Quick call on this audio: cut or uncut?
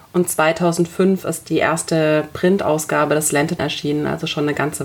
cut